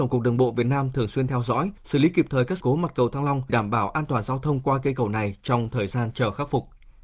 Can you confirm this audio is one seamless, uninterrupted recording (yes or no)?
no